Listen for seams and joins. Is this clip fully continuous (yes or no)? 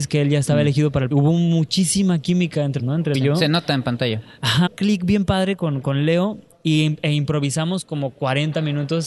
no